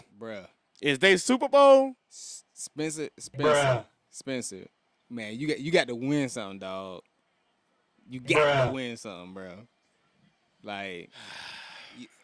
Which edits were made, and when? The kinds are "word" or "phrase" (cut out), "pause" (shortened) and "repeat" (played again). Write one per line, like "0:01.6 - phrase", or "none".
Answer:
none